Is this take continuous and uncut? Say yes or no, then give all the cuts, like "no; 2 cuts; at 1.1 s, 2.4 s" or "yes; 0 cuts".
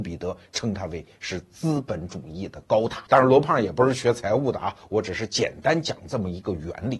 no; 1 cut; at 3.1 s